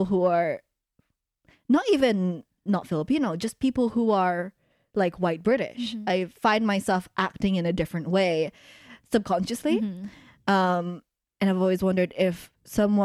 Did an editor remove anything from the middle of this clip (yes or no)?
no